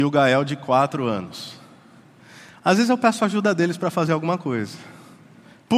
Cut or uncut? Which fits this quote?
uncut